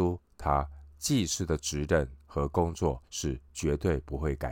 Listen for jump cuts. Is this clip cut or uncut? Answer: cut